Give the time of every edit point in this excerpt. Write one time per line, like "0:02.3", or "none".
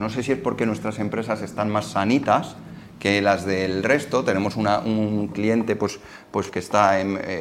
0:06.5